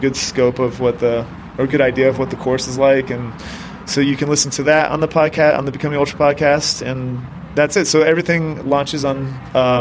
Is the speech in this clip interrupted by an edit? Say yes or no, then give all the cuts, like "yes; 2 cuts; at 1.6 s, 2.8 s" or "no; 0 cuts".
no; 0 cuts